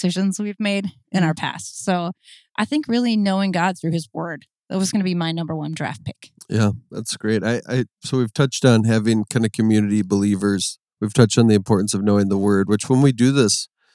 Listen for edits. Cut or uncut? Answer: uncut